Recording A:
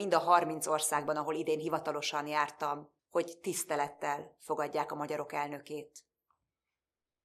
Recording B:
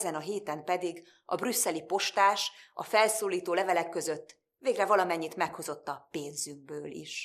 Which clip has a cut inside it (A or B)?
A